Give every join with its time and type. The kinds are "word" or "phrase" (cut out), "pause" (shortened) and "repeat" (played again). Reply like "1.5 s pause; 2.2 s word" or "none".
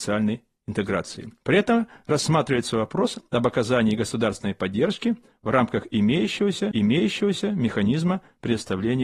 6.7 s repeat